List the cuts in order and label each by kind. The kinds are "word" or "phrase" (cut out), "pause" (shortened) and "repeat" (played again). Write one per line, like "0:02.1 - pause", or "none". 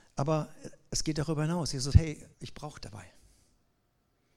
0:01.9 - word
0:02.3 - pause
0:02.8 - word